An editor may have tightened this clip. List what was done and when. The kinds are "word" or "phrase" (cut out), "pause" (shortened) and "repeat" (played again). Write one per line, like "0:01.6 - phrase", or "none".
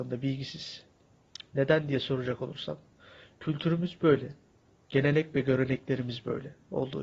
none